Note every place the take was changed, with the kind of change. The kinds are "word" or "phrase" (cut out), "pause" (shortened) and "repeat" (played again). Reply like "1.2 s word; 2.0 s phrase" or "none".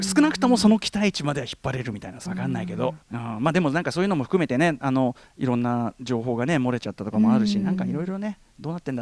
2.3 s phrase; 3.0 s pause